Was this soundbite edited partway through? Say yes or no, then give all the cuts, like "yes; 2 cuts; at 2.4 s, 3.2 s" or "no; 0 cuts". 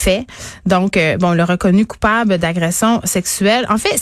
no; 0 cuts